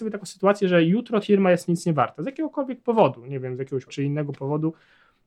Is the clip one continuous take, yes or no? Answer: no